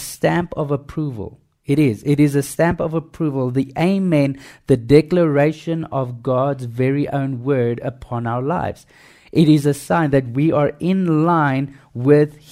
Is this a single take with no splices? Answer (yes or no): yes